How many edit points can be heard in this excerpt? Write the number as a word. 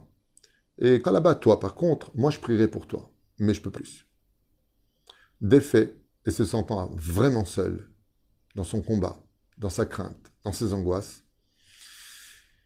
three